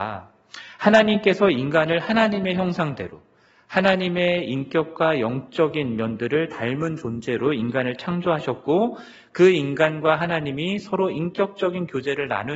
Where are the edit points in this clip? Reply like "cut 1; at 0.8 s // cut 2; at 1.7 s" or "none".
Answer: none